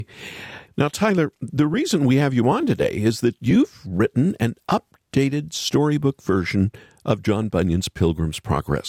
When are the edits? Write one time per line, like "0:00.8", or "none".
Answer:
none